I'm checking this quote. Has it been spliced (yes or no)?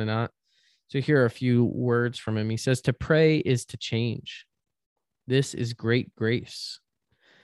no